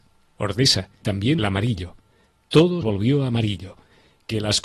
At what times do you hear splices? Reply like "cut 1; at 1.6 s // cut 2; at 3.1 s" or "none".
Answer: cut 1; at 1.0 s // cut 2; at 1.4 s // cut 3; at 2.8 s